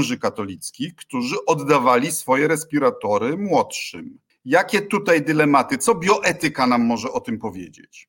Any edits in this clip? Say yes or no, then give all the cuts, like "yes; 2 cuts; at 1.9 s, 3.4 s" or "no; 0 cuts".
yes; 1 cut; at 4.3 s